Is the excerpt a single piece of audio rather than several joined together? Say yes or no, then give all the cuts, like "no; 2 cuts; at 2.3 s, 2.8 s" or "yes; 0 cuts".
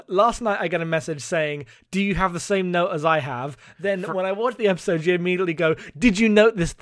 yes; 0 cuts